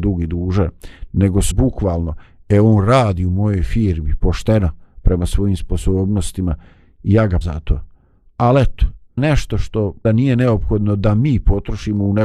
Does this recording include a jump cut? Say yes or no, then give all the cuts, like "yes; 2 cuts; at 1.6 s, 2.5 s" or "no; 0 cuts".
yes; 4 cuts; at 1.5 s, 7.4 s, 9.2 s, 10.0 s